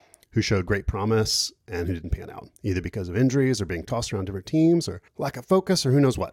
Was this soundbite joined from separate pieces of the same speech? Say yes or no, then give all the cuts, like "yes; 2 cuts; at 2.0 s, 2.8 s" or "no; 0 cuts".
yes; 2 cuts; at 2.6 s, 5.1 s